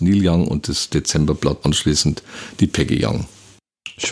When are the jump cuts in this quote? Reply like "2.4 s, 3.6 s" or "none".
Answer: 1.6 s